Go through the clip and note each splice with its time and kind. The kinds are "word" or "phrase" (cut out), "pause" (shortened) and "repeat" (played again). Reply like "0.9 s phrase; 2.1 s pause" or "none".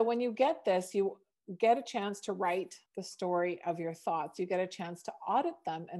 2.9 s pause